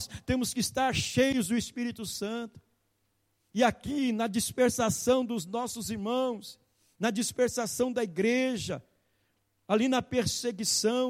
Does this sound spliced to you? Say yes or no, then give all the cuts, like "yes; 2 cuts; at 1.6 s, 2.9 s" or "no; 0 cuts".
no; 0 cuts